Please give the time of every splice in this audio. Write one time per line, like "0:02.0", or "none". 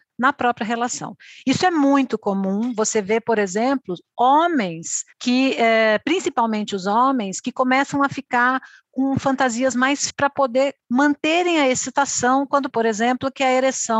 0:05.1
0:10.1
0:10.8
0:12.7